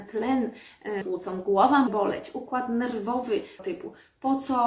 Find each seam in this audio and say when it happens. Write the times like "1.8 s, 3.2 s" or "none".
1.0 s, 1.9 s, 3.6 s